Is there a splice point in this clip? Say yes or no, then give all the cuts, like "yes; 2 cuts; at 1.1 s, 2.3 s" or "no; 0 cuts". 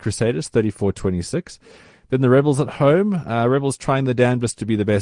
no; 0 cuts